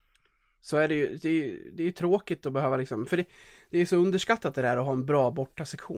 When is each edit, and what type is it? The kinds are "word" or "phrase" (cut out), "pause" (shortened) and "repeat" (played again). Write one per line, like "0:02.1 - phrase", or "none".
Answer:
none